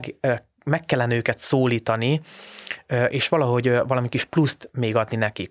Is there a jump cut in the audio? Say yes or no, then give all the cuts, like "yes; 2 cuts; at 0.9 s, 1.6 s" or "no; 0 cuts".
no; 0 cuts